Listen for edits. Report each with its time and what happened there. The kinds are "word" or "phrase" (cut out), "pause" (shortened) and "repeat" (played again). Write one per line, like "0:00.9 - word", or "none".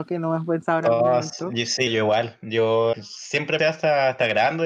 0:01.9 - word
0:02.9 - word
0:03.6 - word